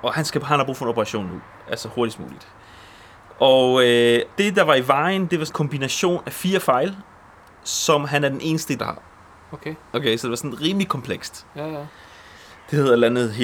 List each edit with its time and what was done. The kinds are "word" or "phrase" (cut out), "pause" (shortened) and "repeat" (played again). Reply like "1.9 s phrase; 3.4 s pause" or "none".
4.3 s word; 5.5 s word; 8.8 s word